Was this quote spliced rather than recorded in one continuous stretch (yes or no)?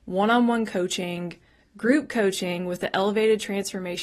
no